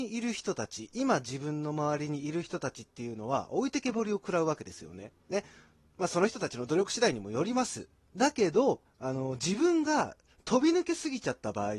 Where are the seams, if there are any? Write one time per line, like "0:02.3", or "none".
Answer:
0:05.2
0:08.9